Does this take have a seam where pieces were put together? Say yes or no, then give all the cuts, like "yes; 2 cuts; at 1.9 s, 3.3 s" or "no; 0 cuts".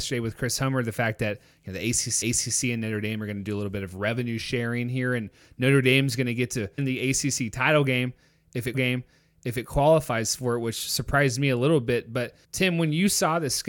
yes; 4 cuts; at 2.2 s, 6.8 s, 8.7 s, 12.4 s